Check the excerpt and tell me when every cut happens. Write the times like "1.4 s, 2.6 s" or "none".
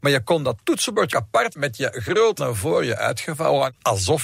1.1 s, 1.5 s, 2.4 s